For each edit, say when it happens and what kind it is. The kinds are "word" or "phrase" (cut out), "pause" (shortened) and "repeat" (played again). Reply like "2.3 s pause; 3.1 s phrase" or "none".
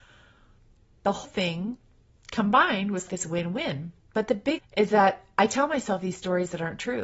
1.2 s word; 3.1 s word; 4.0 s pause; 4.6 s phrase